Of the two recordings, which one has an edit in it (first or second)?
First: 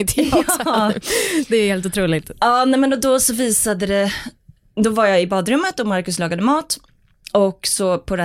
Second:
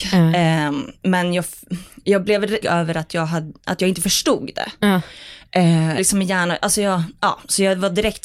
second